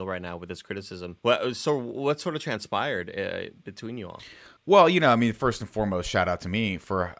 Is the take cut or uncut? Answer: cut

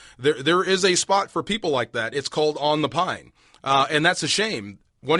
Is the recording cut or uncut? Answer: uncut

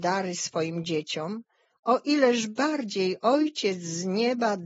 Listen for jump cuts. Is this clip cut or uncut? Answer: uncut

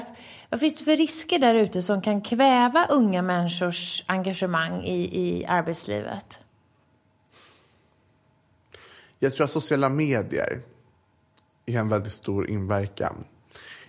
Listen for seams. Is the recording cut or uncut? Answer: uncut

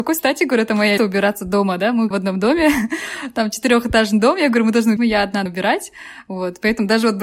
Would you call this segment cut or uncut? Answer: cut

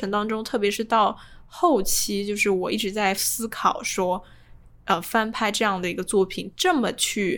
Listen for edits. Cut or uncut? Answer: uncut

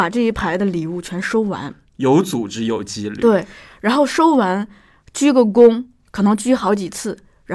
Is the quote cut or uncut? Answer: uncut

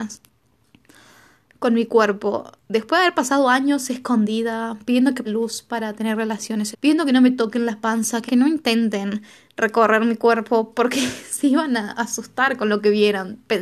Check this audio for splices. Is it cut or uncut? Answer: cut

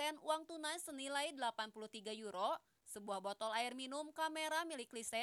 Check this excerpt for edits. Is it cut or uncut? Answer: uncut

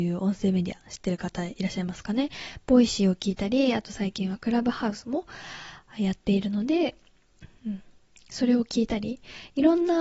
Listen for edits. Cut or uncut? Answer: uncut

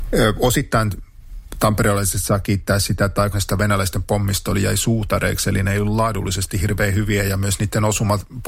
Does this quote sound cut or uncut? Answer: cut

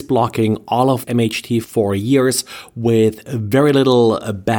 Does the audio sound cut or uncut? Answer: cut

